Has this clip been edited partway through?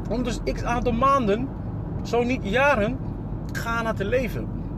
yes; 1 cut; at 3.5 s

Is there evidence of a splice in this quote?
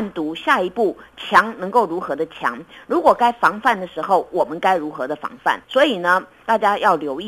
yes; 1 cut; at 5.6 s

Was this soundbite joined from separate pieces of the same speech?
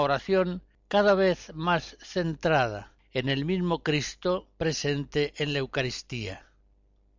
no; 0 cuts

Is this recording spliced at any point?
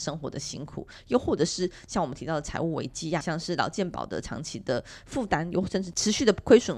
yes; 1 cut; at 3.2 s

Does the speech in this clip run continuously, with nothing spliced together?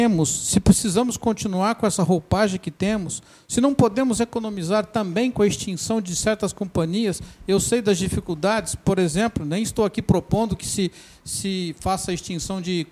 yes; 0 cuts

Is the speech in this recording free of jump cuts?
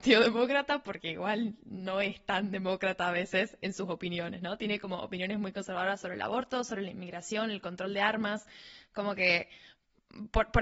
yes; 0 cuts

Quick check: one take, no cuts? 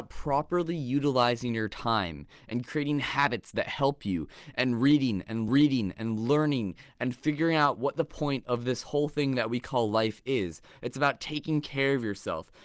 no; 1 cut; at 5.5 s

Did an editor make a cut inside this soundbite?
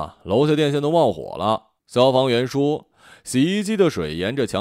yes; 1 cut; at 1.8 s

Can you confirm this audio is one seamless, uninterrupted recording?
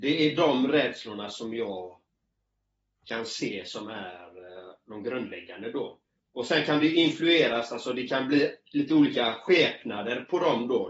yes; 0 cuts

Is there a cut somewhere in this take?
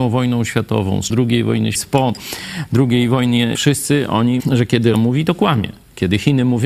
yes; 5 cuts; at 1.1 s, 1.7 s, 3.5 s, 4.4 s, 4.9 s

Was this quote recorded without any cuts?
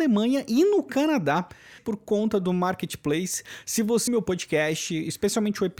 no; 2 cuts; at 1.8 s, 4.1 s

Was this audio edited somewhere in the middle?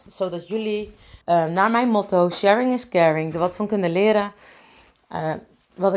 yes; 1 cut; at 1.2 s

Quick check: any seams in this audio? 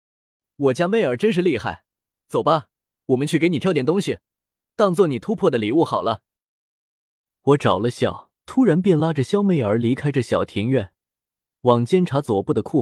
yes; 1 cut; at 8.4 s

